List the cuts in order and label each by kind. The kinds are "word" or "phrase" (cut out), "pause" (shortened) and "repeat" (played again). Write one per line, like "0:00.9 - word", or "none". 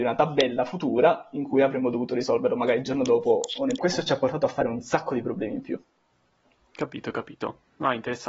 0:03.8 - phrase